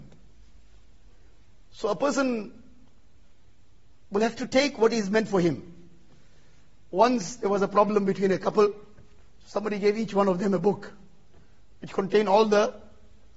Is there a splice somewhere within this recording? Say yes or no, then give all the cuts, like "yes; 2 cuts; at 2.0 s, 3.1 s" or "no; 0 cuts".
no; 0 cuts